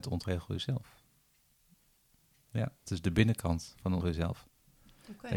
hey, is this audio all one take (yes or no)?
no